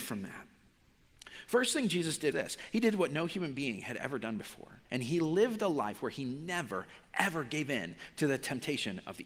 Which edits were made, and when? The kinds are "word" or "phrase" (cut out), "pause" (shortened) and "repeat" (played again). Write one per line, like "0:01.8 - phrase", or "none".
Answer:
0:02.3 - word
0:04.9 - pause